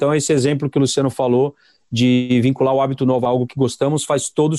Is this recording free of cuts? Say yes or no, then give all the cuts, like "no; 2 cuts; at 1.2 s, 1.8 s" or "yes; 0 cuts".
yes; 0 cuts